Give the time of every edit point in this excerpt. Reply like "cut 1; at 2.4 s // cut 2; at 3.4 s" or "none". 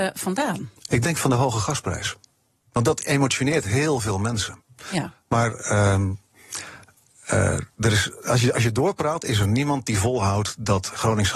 cut 1; at 7.7 s

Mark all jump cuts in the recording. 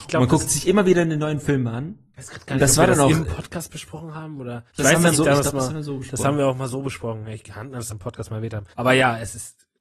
cut 1; at 4.7 s // cut 2; at 5.1 s // cut 3; at 7.9 s // cut 4; at 8.7 s

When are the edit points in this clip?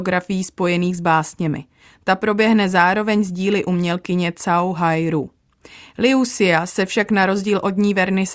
none

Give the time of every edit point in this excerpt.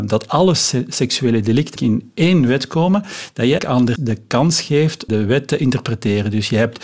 cut 1; at 1.8 s // cut 2; at 3.6 s // cut 3; at 4.0 s // cut 4; at 5.1 s

